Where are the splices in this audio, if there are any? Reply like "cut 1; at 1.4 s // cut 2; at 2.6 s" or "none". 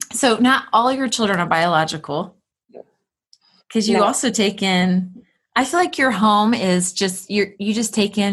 none